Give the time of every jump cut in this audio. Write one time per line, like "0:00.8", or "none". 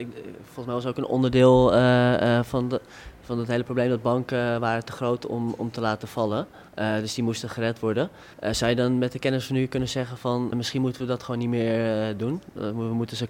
0:06.7
0:08.3
0:10.5

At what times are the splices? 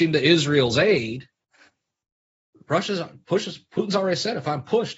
none

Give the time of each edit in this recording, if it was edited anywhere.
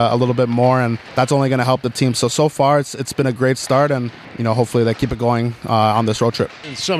none

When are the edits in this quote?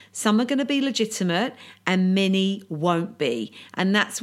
none

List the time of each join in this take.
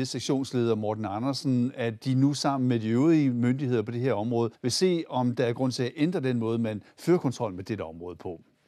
0:04.5

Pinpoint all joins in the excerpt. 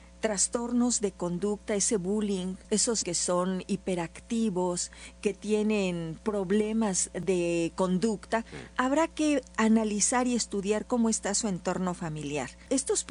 0:03.0

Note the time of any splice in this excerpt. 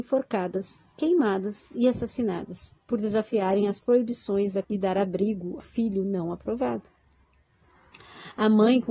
0:04.6
0:05.6

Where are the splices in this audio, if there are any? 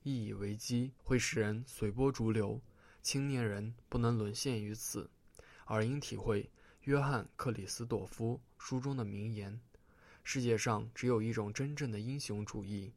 0:01.0

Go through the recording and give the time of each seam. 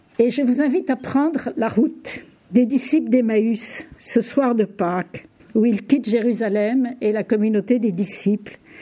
0:05.4

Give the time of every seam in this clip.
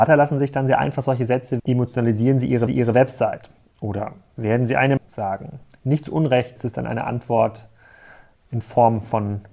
0:01.6
0:02.7
0:05.0
0:06.6

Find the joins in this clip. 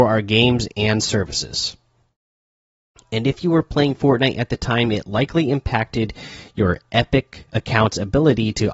0:07.5

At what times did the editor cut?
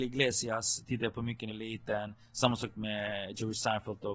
0:01.5

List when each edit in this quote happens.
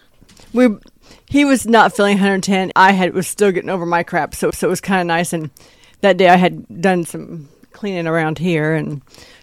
0:02.7
0:04.5

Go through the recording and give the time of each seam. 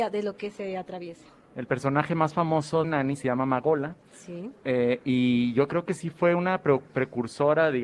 0:02.8

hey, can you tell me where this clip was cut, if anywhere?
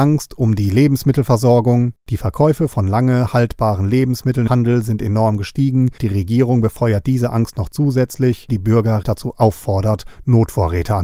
0:04.5
0:06.0
0:08.5
0:09.0

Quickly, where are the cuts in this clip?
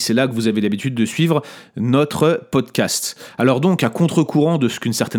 none

